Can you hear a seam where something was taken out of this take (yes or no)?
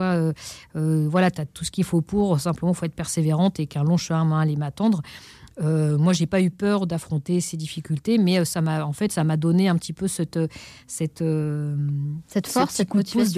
no